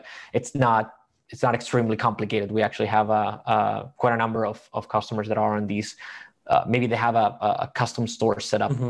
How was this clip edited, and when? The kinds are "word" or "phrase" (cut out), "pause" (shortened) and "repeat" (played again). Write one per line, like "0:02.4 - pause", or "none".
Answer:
none